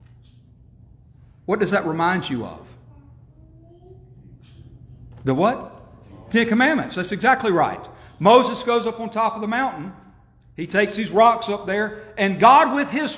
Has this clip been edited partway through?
no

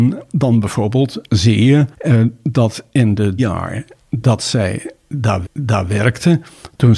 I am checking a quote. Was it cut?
yes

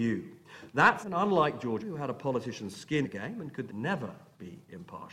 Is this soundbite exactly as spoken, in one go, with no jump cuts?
no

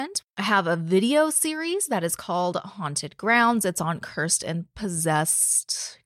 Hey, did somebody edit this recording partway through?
no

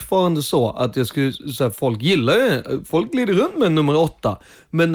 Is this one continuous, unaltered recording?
yes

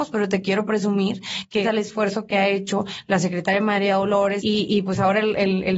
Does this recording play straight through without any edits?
no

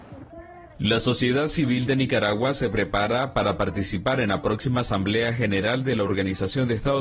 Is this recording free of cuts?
yes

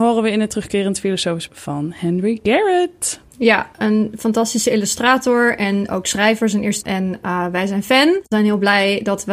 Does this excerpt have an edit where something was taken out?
yes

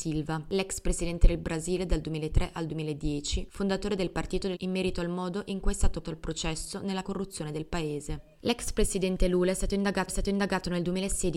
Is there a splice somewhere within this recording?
yes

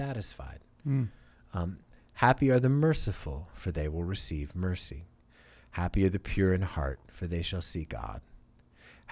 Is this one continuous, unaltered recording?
yes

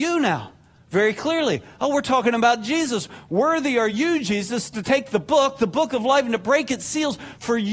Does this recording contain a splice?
no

